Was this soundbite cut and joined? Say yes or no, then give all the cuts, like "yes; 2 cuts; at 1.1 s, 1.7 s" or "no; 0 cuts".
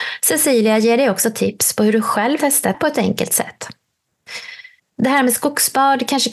yes; 3 cuts; at 2.4 s, 2.7 s, 4.8 s